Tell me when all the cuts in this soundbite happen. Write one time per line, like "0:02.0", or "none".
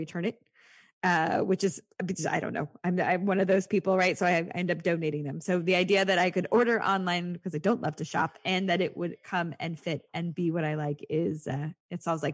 none

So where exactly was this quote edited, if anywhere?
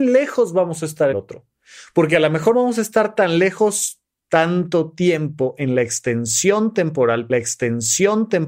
0:01.1
0:02.5
0:07.3

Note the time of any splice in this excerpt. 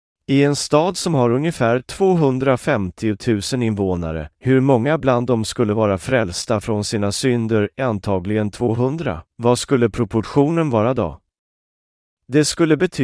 0:04.3
0:09.3

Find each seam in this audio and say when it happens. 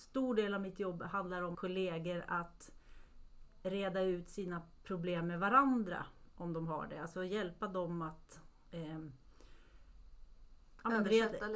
0:01.5

